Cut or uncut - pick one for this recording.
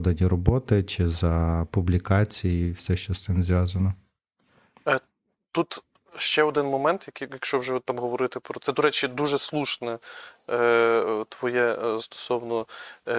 cut